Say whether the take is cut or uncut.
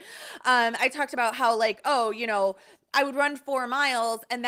uncut